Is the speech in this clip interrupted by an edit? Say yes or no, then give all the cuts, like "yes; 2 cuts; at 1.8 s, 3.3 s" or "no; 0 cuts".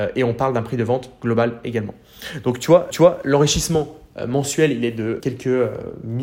yes; 2 cuts; at 2.9 s, 5.2 s